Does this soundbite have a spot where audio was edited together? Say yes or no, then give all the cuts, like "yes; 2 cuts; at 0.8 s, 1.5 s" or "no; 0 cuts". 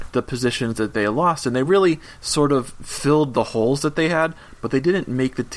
no; 0 cuts